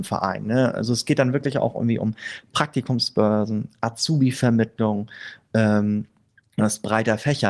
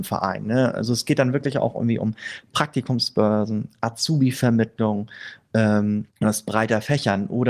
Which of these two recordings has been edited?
second; 1 cut; at 6.1 s

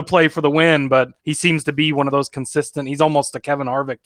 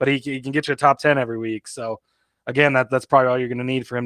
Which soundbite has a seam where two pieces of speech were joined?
first; 1 cut; at 1.2 s

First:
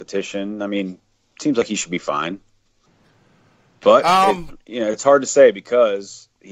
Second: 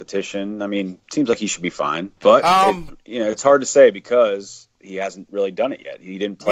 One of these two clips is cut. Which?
second; 2 cuts; at 1.0 s, 2.2 s

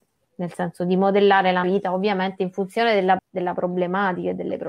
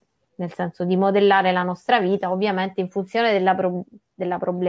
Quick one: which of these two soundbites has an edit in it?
first; 2 cuts; at 1.6 s, 3.2 s

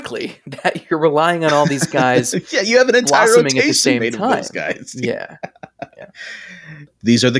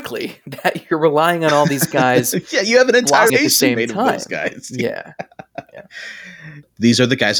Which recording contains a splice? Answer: second; 1 cut; at 3.3 s

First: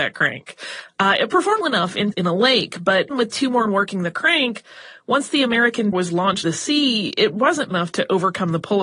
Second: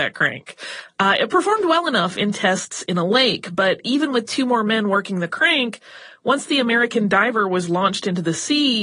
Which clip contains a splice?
first; 7 cuts; at 1.6 s, 2.1 s, 3.1 s, 3.7 s, 5.9 s, 6.4 s, 7.7 s

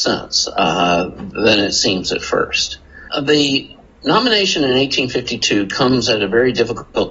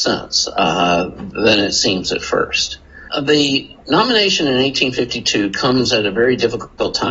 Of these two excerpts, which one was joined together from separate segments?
second; 1 cut; at 3.8 s

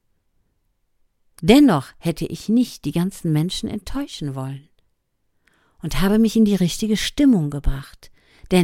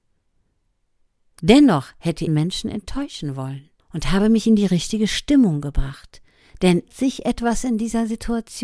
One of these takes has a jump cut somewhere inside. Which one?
second; 3 cuts; at 2.3 s, 3.8 s, 6.9 s

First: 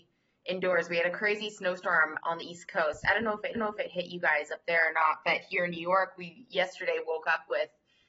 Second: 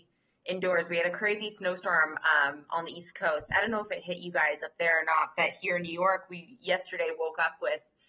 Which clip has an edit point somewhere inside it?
first; 2 cuts; at 2.2 s, 3.5 s

